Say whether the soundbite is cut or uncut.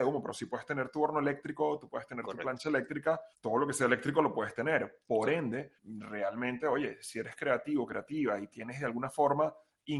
cut